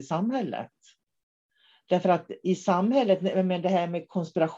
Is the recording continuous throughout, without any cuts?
yes; 0 cuts

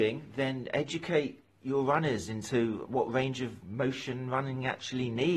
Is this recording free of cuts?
yes; 0 cuts

